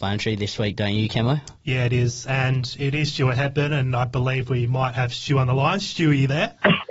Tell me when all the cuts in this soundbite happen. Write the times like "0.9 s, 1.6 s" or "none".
none